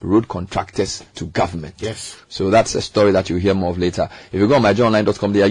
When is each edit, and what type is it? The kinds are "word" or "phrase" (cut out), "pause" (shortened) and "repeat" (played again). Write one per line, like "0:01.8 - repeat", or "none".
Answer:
0:01.1 - pause